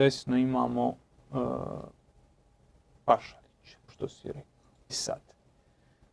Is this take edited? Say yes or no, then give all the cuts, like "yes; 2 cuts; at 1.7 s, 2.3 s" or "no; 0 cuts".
yes; 2 cuts; at 3.9 s, 4.9 s